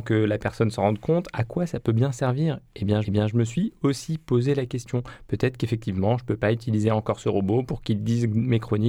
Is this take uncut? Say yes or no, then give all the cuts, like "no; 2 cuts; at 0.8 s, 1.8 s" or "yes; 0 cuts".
no; 1 cut; at 3.0 s